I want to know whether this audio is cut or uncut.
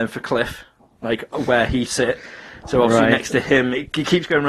cut